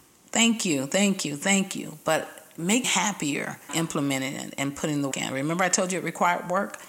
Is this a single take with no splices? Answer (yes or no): no